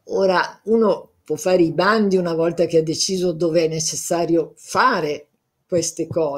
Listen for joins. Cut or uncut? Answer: uncut